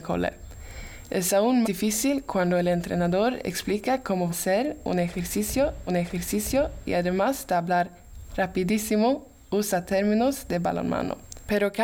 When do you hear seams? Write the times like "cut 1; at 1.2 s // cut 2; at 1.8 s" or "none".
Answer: cut 1; at 1.6 s // cut 2; at 4.3 s // cut 3; at 5.9 s